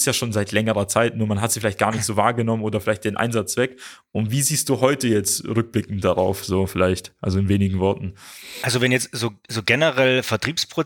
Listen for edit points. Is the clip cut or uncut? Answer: uncut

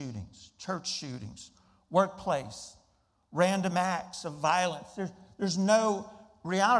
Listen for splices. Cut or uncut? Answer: uncut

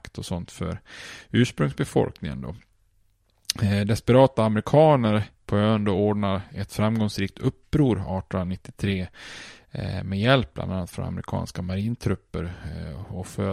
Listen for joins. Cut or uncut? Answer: uncut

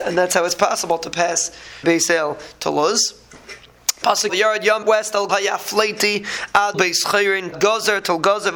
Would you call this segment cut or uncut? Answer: cut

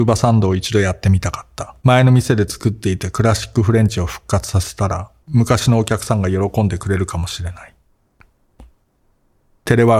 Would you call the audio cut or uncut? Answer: cut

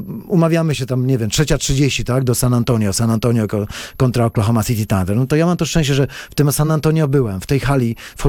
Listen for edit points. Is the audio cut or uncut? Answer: uncut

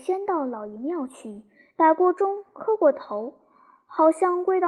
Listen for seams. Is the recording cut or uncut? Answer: uncut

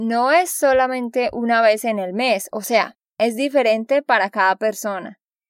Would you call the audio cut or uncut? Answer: cut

